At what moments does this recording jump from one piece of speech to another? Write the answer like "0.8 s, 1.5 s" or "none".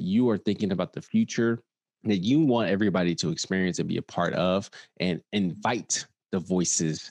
1.8 s